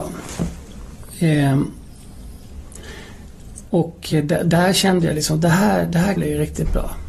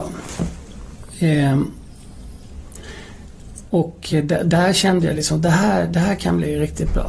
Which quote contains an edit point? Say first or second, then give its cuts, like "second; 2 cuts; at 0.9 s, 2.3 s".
first; 1 cut; at 6.2 s